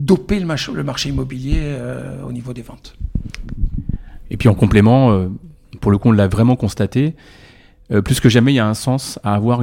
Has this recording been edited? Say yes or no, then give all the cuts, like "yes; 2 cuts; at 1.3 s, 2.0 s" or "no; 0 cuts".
no; 0 cuts